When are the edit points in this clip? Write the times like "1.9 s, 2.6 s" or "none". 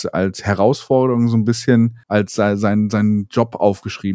2.0 s